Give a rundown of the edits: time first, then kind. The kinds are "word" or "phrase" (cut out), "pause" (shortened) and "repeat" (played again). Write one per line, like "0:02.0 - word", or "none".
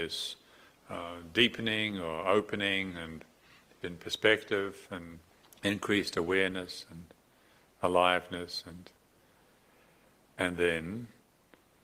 0:03.8 - word
0:05.3 - pause